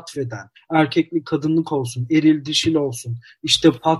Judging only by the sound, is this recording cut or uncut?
uncut